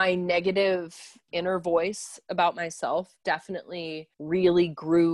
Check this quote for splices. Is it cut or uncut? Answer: cut